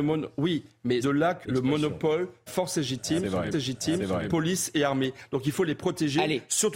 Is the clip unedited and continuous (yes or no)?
no